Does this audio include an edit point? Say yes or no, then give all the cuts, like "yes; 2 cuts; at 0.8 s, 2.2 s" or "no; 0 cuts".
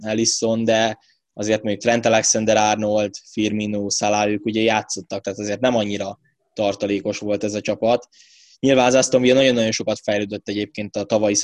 no; 0 cuts